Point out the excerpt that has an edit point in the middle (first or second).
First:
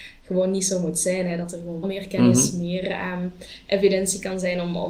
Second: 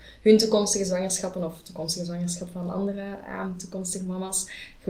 first